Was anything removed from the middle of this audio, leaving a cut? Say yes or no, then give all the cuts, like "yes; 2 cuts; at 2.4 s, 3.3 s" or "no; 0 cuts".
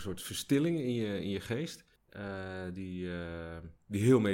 no; 0 cuts